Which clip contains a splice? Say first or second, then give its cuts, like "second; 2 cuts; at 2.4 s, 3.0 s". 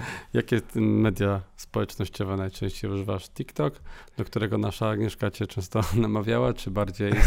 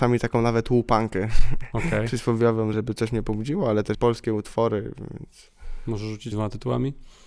second; 3 cuts; at 2.7 s, 3.9 s, 6.3 s